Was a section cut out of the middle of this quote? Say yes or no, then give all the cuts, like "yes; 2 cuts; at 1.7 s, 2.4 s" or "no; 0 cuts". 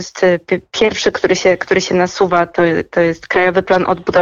no; 0 cuts